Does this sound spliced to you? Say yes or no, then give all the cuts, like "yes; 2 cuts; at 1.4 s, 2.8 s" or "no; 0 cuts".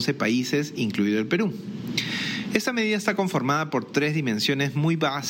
no; 0 cuts